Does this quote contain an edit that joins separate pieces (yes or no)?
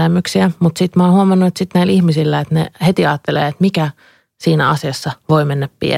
no